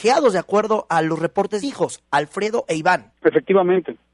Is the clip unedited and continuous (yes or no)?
no